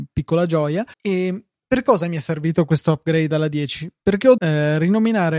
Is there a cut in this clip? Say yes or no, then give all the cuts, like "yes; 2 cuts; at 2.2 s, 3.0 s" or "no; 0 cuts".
yes; 2 cuts; at 0.9 s, 4.4 s